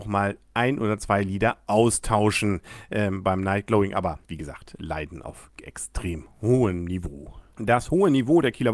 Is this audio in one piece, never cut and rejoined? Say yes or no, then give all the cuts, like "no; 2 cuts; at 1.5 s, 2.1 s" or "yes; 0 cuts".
no; 1 cut; at 4.2 s